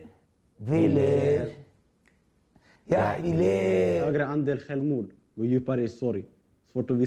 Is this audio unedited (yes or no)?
no